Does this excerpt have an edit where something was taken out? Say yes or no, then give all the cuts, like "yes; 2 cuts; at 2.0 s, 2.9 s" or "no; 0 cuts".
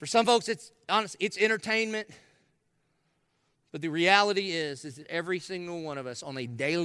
no; 0 cuts